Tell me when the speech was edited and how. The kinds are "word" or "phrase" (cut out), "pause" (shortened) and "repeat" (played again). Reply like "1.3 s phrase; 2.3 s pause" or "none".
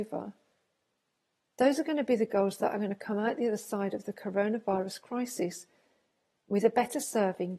none